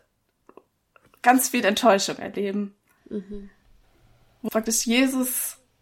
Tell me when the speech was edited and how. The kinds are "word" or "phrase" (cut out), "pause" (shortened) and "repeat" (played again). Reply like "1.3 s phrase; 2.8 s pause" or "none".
4.5 s word